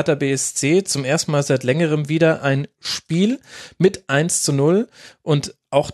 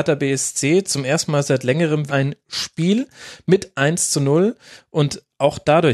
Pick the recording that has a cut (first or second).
second